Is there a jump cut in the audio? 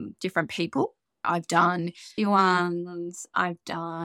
yes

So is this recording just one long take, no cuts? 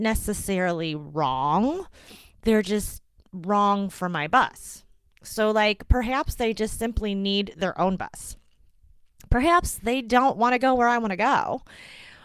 yes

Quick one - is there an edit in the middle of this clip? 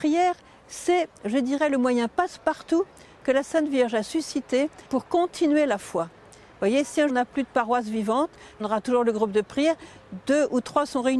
yes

